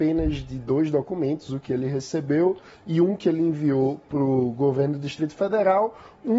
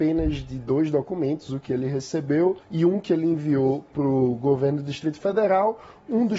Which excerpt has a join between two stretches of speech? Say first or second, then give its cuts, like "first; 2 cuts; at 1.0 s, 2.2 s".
second; 1 cut; at 2.6 s